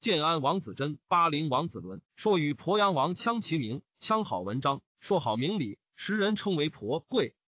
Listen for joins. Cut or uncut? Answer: cut